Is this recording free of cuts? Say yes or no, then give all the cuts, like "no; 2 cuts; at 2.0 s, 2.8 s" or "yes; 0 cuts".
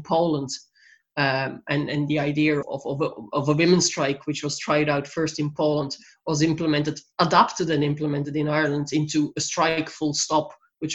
no; 1 cut; at 2.6 s